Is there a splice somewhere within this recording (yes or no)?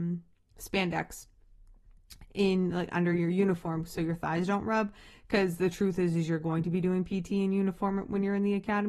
no